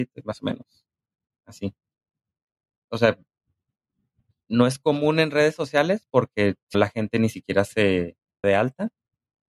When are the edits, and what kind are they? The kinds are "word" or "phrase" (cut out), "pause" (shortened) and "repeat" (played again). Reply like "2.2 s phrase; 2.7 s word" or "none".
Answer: 6.7 s word; 8.4 s word